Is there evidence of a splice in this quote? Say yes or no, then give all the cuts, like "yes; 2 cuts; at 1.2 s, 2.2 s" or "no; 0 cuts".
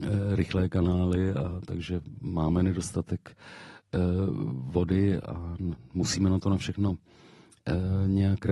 no; 0 cuts